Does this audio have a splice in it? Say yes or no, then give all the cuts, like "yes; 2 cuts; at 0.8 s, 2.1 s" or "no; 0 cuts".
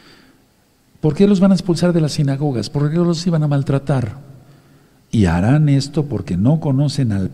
no; 0 cuts